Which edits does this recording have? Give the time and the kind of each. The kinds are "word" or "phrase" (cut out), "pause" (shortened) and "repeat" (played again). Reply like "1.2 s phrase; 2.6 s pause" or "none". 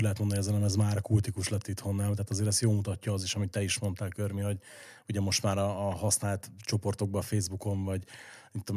none